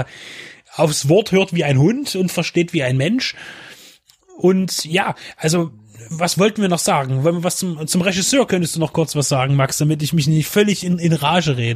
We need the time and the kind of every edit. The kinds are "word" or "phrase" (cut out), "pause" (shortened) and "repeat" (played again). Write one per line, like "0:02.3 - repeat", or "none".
none